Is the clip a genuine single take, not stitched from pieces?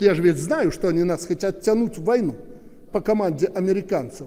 yes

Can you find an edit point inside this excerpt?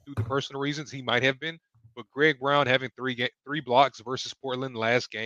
no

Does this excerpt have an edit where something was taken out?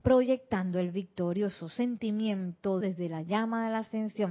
yes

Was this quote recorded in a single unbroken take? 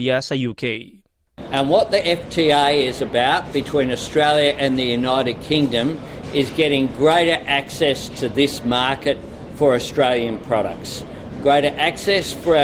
yes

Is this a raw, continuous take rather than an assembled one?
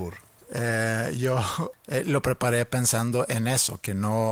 yes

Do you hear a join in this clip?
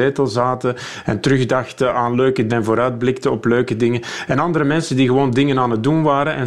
yes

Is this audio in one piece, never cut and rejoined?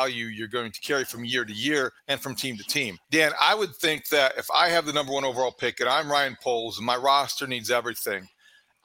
no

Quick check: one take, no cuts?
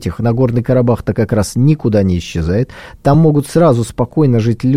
yes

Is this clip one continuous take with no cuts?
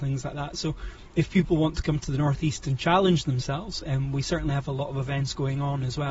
yes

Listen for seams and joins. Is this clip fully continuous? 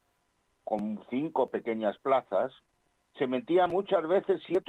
yes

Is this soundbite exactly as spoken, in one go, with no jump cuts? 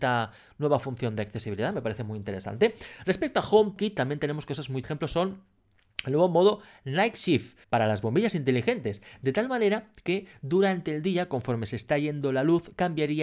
no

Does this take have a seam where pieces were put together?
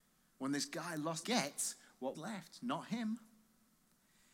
yes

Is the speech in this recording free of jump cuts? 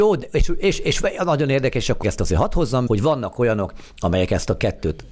no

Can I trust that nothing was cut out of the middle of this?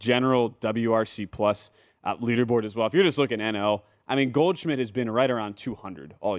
yes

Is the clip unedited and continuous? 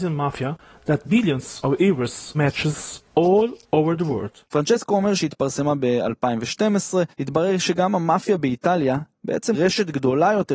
no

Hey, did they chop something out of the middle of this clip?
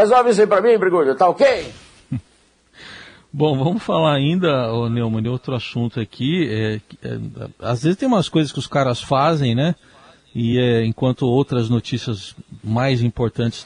no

